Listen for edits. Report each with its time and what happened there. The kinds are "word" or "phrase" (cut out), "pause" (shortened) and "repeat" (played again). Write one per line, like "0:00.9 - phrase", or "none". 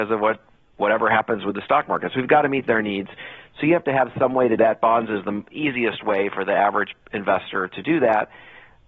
0:04.6 - word

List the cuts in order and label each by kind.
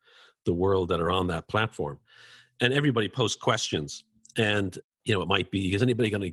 none

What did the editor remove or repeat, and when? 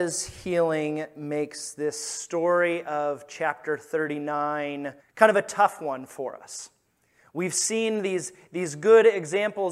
0:05.0 - word

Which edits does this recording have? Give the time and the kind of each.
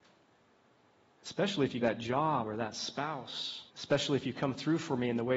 0:01.8 - phrase
0:03.7 - pause

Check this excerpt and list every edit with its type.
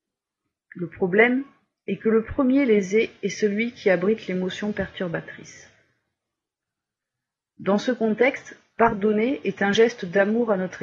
none

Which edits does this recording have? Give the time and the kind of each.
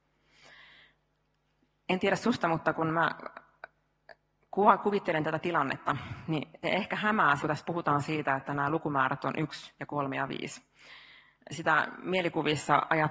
0:06.6 - word
0:07.4 - word

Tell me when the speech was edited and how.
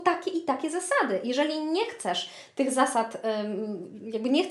none

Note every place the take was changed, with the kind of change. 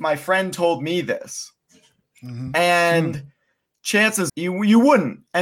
0:04.3 - word

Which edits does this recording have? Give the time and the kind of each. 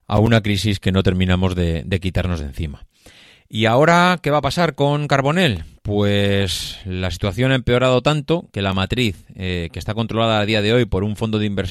none

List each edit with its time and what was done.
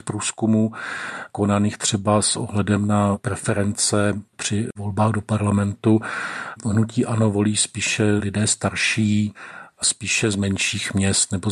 0:04.3 - pause

